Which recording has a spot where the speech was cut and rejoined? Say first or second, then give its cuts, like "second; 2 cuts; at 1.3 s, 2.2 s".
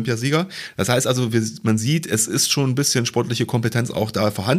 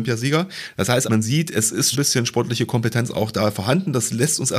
second; 2 cuts; at 1.0 s, 1.9 s